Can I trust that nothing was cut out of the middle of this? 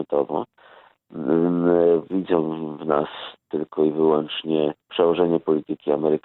no; 1 cut; at 4.8 s

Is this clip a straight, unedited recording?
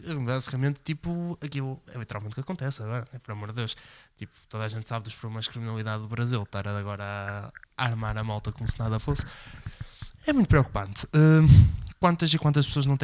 yes; 0 cuts

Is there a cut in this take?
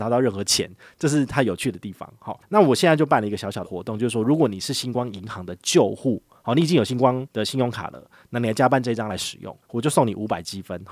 no; 0 cuts

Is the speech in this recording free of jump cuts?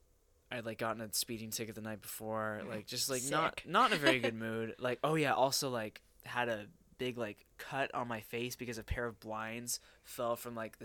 yes; 0 cuts

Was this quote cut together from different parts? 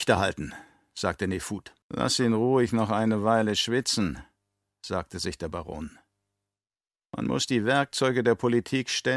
yes; 1 cut; at 1.8 s

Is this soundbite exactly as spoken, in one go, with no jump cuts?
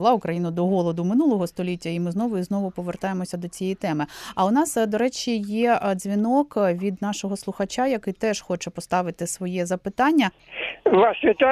yes; 0 cuts

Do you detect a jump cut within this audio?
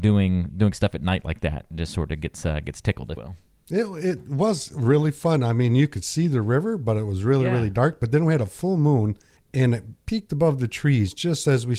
yes; 3 cuts; at 3.2 s, 9.4 s, 10.0 s

